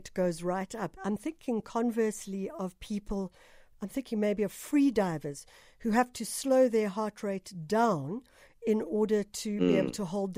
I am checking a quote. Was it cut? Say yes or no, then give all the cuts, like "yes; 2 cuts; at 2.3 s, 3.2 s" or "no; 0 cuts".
no; 0 cuts